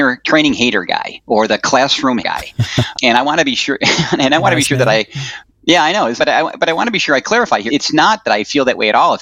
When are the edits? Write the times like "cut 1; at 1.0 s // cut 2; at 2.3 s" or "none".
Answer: cut 1; at 2.2 s // cut 2; at 2.9 s // cut 3; at 6.2 s // cut 4; at 7.7 s